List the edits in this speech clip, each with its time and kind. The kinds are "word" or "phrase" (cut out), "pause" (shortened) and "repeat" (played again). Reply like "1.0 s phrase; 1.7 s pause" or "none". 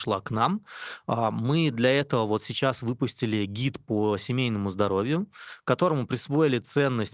none